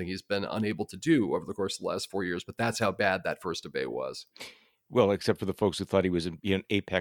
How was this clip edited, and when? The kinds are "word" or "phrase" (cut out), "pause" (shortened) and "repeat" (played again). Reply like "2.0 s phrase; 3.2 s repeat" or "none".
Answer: none